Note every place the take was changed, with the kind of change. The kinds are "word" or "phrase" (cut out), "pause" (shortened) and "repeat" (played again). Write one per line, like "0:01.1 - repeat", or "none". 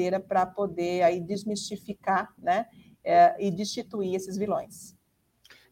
none